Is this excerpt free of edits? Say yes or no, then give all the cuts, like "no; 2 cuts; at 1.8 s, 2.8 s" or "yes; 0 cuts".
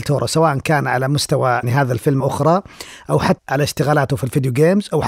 no; 3 cuts; at 1.6 s, 2.2 s, 3.4 s